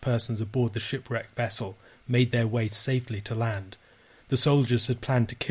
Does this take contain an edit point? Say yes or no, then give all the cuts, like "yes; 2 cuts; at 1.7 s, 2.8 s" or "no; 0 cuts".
no; 0 cuts